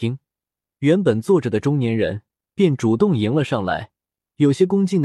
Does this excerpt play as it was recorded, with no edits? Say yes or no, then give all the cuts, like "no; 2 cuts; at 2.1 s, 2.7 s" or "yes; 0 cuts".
yes; 0 cuts